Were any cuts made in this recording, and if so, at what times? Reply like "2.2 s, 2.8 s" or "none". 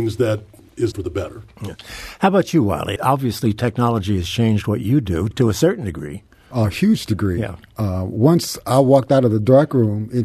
0.9 s, 3.0 s, 5.3 s, 6.5 s